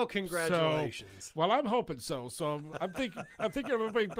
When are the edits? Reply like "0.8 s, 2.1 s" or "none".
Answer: none